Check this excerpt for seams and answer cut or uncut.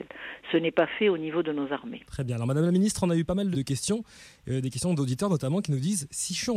cut